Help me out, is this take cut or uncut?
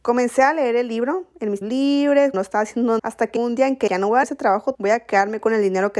cut